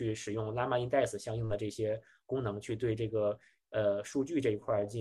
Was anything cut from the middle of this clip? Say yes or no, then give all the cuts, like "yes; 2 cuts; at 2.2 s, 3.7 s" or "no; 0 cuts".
no; 0 cuts